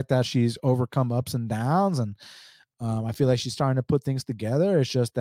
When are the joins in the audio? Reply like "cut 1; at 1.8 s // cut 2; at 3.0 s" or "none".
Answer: none